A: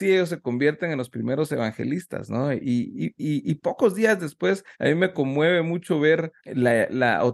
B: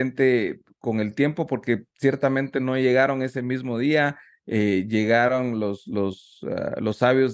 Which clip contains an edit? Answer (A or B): A